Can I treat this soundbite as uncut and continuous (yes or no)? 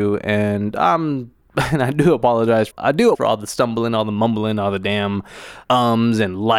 no